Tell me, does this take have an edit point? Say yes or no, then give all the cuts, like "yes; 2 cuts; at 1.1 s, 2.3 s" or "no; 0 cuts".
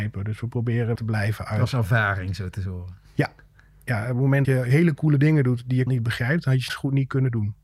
yes; 4 cuts; at 1.0 s, 4.4 s, 5.9 s, 6.7 s